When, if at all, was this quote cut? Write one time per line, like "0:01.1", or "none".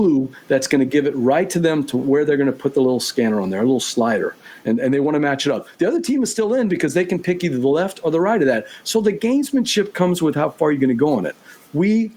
none